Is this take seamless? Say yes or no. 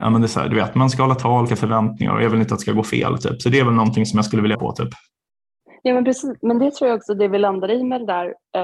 no